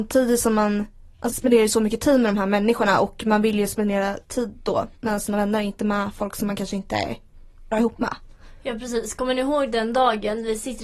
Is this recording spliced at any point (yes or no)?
yes